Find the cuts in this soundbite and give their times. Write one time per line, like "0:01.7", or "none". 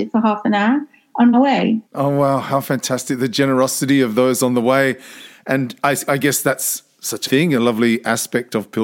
0:01.3
0:01.9
0:07.3